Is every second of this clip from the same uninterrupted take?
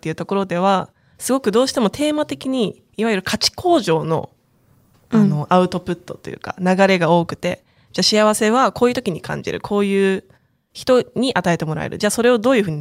no; 1 cut; at 2.9 s

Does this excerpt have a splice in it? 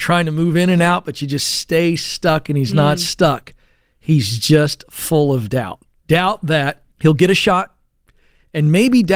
yes; 1 cut; at 6.9 s

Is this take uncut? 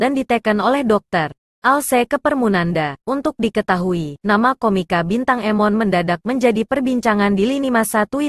no; 2 cuts; at 1.4 s, 3.0 s

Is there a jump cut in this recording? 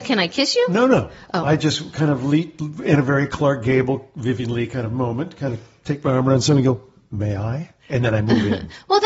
no; 0 cuts

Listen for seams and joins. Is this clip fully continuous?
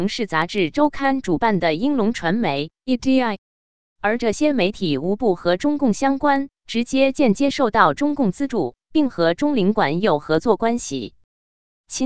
yes; 0 cuts

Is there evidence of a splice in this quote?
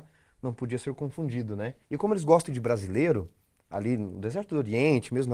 yes; 2 cuts; at 1.8 s, 2.5 s

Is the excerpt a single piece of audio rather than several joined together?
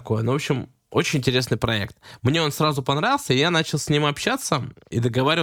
yes; 0 cuts

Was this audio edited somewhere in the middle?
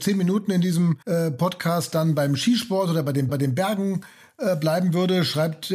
yes; 2 cuts; at 1.0 s, 3.3 s

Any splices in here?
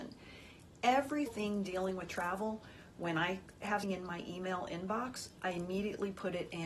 yes; 2 cuts; at 1.3 s, 3.8 s

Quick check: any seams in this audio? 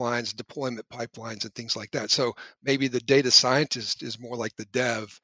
no; 0 cuts

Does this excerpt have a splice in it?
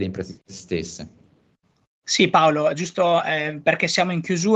yes; 1 cut; at 1.6 s

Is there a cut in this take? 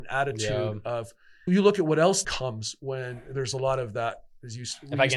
yes; 2 cuts; at 1.5 s, 2.2 s

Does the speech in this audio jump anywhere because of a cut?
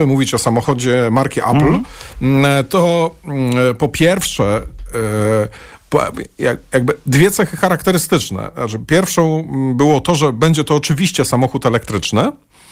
no; 0 cuts

